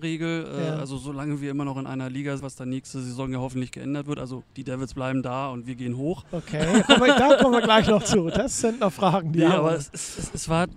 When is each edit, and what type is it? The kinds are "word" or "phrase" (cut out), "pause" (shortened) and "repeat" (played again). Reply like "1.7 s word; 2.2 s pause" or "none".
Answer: 2.4 s word; 4.5 s pause

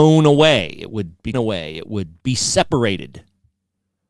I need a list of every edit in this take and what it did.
1.3 s word; 2.2 s pause

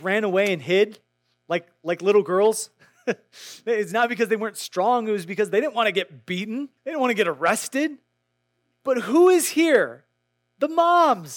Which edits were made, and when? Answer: 6.8 s pause

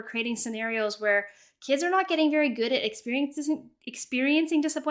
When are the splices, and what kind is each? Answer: none

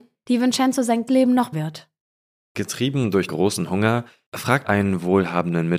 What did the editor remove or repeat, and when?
1.1 s word; 1.5 s word; 3.3 s word; 4.6 s word

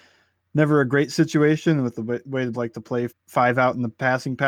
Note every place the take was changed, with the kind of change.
2.5 s word; 3.1 s word

